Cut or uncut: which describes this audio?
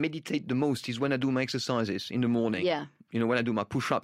uncut